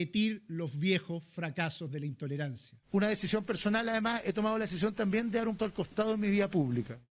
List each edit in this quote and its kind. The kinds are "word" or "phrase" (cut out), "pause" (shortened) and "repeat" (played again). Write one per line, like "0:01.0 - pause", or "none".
0:02.8 - pause
0:05.6 - word